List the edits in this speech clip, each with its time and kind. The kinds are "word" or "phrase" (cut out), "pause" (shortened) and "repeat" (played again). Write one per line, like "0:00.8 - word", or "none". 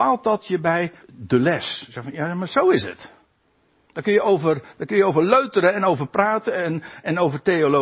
0:01.0 - pause